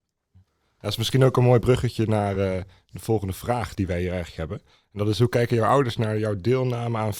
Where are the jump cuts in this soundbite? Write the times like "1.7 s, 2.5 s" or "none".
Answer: none